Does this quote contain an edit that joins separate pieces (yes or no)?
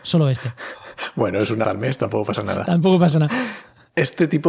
yes